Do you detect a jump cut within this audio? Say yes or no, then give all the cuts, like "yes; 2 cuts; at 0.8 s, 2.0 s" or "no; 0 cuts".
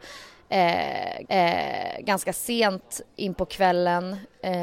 yes; 1 cut; at 1.2 s